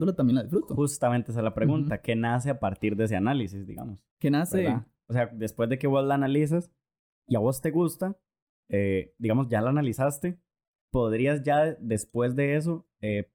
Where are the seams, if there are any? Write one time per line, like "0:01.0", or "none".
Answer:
0:04.1